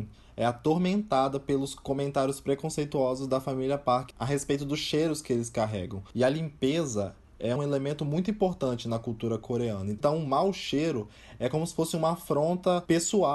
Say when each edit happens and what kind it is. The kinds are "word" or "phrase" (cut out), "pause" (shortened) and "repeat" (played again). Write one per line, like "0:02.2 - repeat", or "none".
0:07.6 - word